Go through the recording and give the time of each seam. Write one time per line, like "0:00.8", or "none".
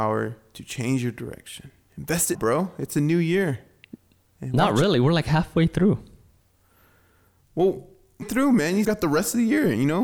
0:02.3
0:08.2
0:08.8